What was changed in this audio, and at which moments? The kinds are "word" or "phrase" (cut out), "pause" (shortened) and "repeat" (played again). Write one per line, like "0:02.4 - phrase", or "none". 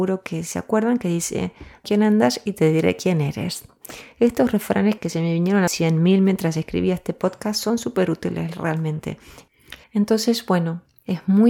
0:01.8 - phrase
0:05.0 - word
0:05.7 - phrase
0:09.8 - pause